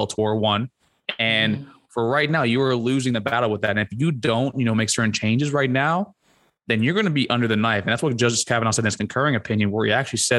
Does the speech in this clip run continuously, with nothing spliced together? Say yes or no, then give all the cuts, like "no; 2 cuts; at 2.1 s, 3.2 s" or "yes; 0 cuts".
yes; 0 cuts